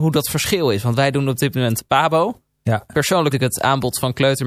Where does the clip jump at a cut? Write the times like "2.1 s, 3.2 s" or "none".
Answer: 3.3 s